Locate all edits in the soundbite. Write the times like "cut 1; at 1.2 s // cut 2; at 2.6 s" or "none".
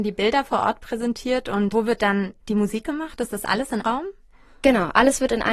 cut 1; at 1.7 s // cut 2; at 3.8 s